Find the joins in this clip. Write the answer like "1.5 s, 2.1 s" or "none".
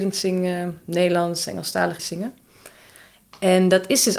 2.0 s